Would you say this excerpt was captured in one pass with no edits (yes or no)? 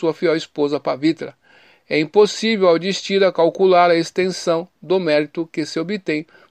yes